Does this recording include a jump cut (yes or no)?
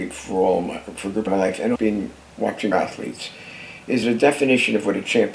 yes